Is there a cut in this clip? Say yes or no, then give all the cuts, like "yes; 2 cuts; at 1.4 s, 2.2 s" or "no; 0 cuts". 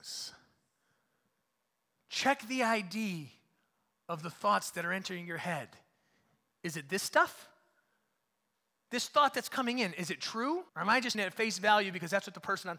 yes; 2 cuts; at 10.7 s, 11.1 s